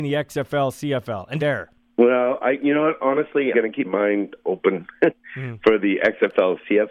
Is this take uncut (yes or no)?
no